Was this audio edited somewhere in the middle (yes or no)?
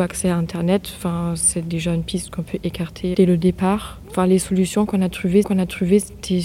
yes